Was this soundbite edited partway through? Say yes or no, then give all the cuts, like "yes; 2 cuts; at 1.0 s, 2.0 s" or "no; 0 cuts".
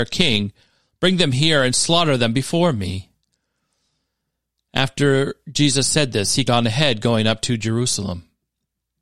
yes; 1 cut; at 6.5 s